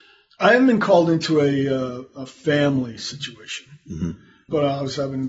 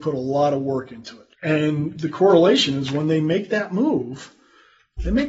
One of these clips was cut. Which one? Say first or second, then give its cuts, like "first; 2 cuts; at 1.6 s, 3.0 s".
second; 1 cut; at 1.3 s